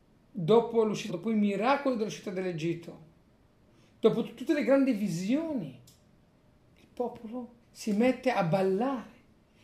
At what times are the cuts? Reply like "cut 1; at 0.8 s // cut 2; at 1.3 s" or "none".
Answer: cut 1; at 1.1 s // cut 2; at 7.6 s